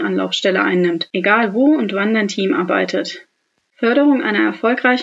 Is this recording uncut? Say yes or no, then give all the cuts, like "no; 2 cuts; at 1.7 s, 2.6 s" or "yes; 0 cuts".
yes; 0 cuts